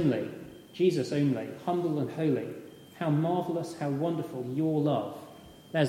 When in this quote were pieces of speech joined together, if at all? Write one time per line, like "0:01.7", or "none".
none